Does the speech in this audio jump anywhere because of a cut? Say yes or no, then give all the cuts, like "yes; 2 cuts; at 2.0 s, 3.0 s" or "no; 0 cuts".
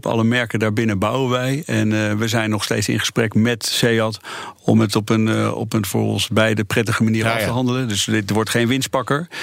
no; 0 cuts